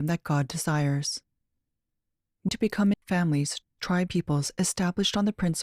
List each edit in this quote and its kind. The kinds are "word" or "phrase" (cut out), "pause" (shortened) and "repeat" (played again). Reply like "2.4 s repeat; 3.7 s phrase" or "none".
2.5 s word; 2.9 s word; 4.1 s word

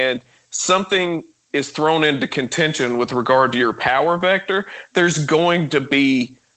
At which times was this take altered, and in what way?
none

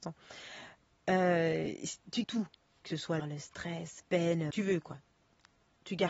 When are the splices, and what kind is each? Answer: 2.2 s word; 3.2 s phrase; 4.0 s phrase; 4.5 s phrase

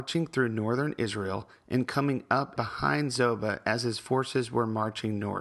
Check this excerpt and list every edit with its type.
2.6 s word

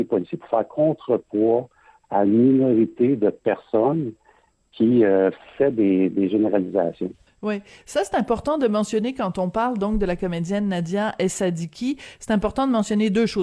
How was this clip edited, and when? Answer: none

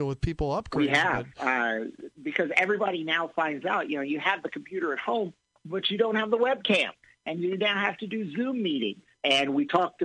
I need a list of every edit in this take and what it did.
none

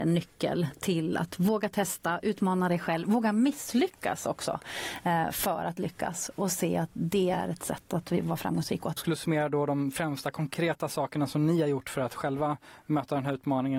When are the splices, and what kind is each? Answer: 9.0 s phrase

